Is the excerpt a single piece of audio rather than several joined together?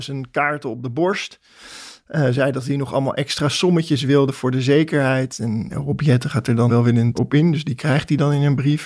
no; 3 cuts; at 5.7 s, 6.7 s, 7.1 s

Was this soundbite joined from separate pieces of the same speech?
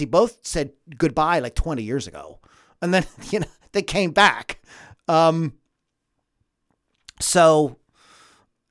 no; 0 cuts

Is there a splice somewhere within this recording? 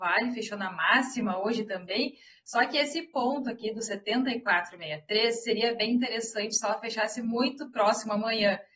no; 0 cuts

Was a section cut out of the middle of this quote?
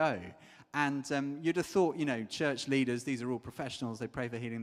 no; 0 cuts

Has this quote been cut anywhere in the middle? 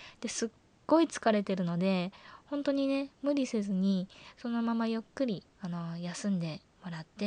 yes; 1 cut; at 5.5 s

